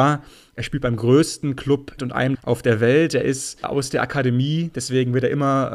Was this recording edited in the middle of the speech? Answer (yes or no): yes